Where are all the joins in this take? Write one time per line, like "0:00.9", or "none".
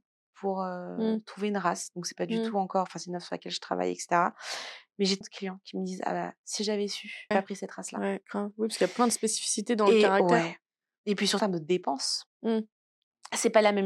0:05.2
0:07.3
0:11.4